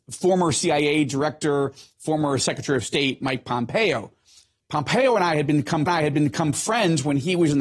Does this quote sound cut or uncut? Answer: cut